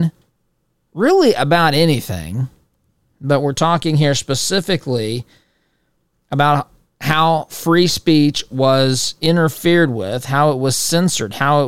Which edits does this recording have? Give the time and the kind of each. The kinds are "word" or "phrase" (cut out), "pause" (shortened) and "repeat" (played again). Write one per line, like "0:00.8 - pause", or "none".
none